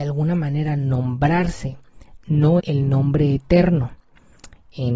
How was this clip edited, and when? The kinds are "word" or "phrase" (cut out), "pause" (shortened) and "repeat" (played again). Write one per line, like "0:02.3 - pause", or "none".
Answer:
0:02.6 - word